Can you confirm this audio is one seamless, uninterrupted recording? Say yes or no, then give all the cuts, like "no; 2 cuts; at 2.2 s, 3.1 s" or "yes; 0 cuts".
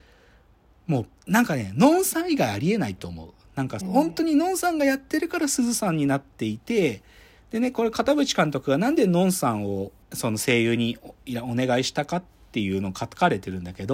no; 4 cuts; at 1.2 s, 3.8 s, 7.4 s, 10.0 s